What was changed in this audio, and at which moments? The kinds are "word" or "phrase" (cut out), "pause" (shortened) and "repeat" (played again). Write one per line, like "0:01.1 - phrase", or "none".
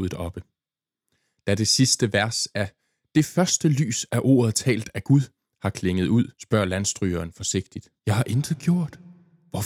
0:06.3 - pause
0:08.0 - pause